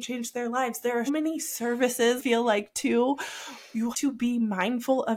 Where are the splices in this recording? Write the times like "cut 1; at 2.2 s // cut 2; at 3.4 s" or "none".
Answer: cut 1; at 1.1 s // cut 2; at 2.2 s // cut 3; at 3.9 s